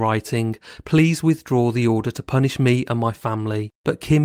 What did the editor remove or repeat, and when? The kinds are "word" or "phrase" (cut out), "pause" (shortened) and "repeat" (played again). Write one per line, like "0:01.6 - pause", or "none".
none